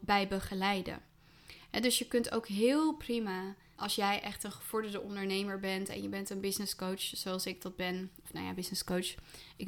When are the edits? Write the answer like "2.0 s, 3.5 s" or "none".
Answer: 3.7 s